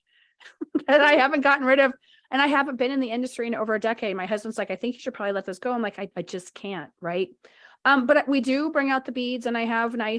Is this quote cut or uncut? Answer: cut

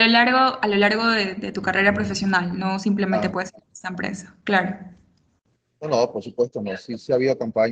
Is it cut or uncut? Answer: uncut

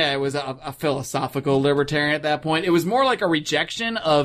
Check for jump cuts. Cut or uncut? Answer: uncut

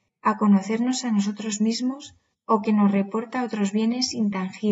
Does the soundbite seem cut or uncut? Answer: uncut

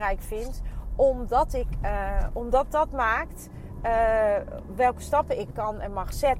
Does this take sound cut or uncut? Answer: uncut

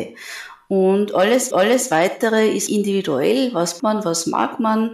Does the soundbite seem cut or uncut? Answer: cut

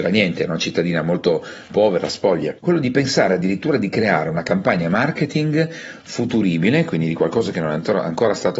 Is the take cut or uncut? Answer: cut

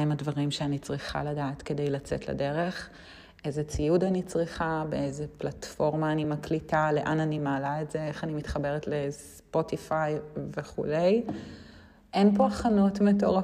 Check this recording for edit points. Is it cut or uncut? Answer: uncut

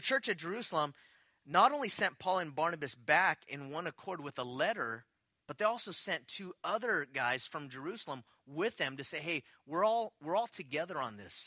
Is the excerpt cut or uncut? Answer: uncut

